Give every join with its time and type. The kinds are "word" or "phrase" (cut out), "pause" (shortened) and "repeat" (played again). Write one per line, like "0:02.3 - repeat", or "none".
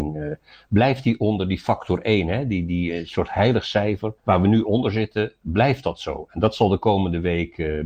0:04.2 - pause